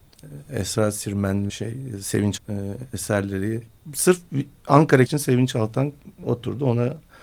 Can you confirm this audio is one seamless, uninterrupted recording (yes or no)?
no